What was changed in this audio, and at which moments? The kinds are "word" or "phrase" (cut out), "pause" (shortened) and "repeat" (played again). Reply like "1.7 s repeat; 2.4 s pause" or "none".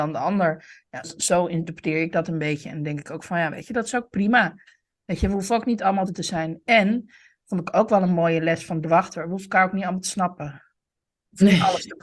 1.0 s word; 6.1 s word; 8.8 s word